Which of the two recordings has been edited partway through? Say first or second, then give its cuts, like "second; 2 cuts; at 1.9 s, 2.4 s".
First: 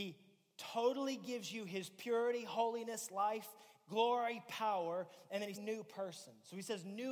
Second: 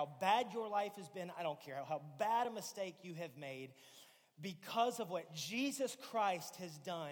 first; 1 cut; at 5.5 s